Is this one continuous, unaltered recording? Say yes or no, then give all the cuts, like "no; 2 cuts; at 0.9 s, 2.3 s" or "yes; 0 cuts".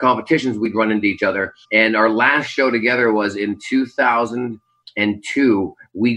no; 1 cut; at 1.6 s